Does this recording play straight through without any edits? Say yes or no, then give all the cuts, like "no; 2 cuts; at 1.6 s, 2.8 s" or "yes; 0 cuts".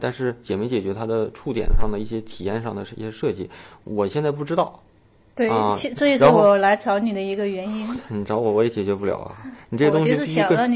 yes; 0 cuts